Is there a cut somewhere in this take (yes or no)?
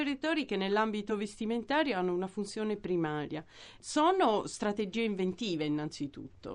no